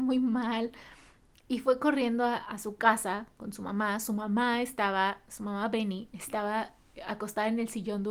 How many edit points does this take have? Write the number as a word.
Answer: zero